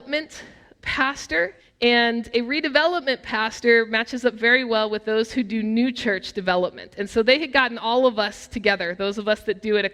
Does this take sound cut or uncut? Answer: cut